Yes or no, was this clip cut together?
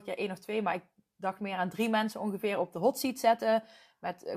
no